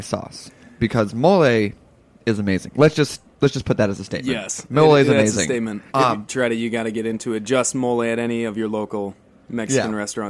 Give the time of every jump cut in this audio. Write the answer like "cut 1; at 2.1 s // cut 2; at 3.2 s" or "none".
cut 1; at 3.3 s // cut 2; at 5.9 s // cut 3; at 6.3 s